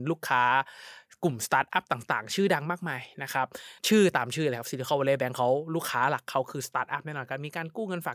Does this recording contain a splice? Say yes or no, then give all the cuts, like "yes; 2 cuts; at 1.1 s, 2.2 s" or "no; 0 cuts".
yes; 1 cut; at 3.8 s